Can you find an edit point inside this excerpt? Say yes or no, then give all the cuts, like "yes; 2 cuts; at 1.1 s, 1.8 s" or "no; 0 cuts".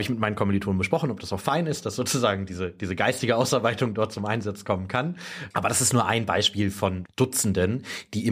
no; 0 cuts